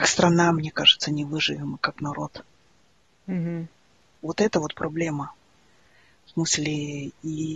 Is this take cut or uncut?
uncut